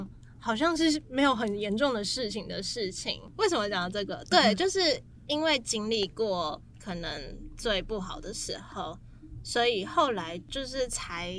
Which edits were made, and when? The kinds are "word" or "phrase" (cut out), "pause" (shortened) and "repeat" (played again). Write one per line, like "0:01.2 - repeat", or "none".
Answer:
0:06.7 - pause